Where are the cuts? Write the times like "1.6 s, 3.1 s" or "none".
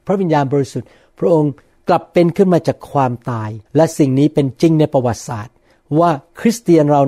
3.7 s